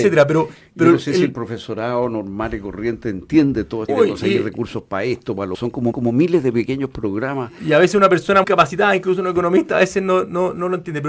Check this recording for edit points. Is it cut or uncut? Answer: cut